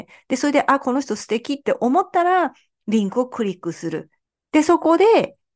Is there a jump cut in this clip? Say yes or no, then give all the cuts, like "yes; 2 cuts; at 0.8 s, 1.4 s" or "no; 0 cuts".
no; 0 cuts